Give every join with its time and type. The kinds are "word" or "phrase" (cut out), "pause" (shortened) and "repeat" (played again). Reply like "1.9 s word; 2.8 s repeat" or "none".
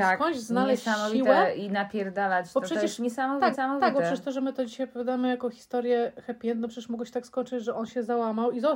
3.5 s repeat

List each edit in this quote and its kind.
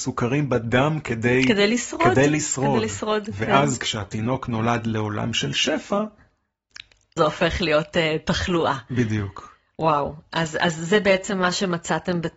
7.2 s phrase

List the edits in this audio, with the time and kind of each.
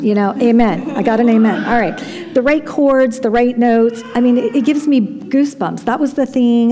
none

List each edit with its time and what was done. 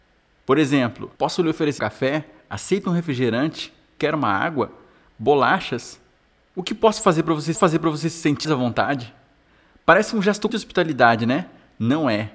1.1 s pause; 1.8 s word; 7.5 s repeat; 8.4 s word; 10.5 s word

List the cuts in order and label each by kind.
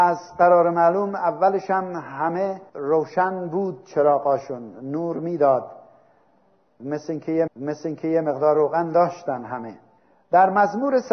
2.7 s pause; 7.5 s repeat; 10.0 s pause

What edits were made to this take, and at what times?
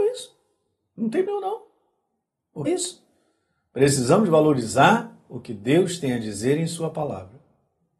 1.3 s word; 2.7 s word

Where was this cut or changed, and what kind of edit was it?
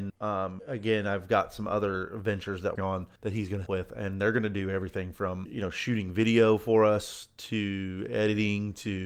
2.7 s phrase; 3.2 s pause; 3.7 s word

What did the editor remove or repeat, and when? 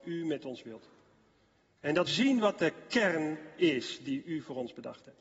2.1 s word

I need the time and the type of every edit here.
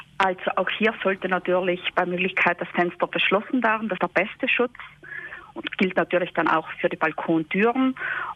4.0 s word

